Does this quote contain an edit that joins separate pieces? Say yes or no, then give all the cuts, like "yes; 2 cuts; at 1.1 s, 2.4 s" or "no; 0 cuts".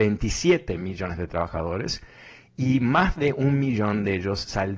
no; 0 cuts